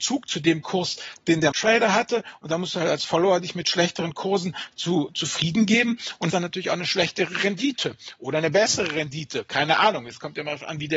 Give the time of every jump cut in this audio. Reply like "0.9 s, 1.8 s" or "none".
1.5 s, 6.3 s